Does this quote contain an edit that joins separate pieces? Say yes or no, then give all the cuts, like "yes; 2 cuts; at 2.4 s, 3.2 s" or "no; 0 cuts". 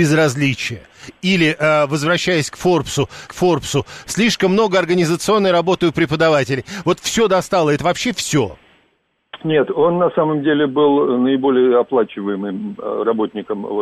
yes; 1 cut; at 3.3 s